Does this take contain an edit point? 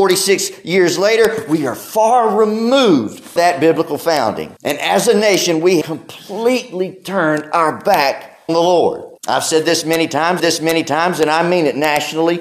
yes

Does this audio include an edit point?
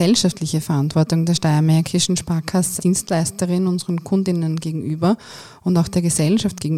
yes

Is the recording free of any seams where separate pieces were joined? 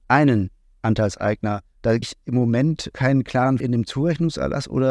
no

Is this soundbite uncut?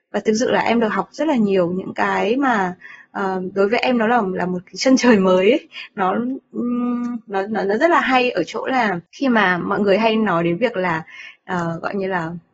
no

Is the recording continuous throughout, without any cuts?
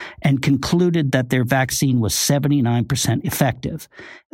yes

